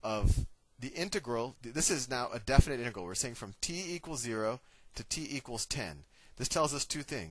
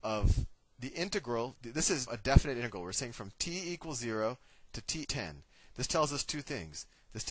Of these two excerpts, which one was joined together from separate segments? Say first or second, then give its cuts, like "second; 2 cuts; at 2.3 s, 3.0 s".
second; 2 cuts; at 2.1 s, 5.0 s